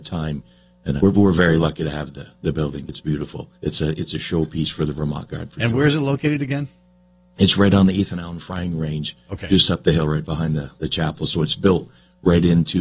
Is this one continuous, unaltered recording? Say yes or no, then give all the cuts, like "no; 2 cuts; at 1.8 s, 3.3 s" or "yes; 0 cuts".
no; 2 cuts; at 1.0 s, 3.5 s